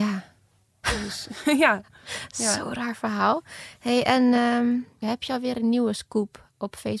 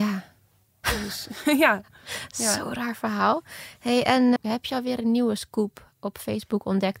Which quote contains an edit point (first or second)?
second